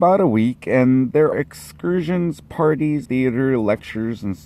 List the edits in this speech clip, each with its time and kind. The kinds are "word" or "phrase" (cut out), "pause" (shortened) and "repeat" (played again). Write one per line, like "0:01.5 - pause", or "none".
0:01.3 - word
0:03.1 - word

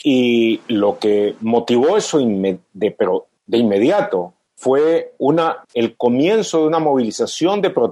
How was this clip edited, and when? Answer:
0:03.4 - pause
0:04.4 - pause
0:05.6 - pause

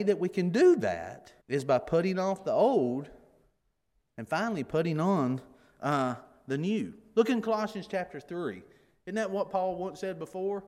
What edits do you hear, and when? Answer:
0:01.4 - pause

